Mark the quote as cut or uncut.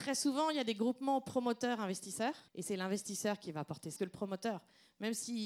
cut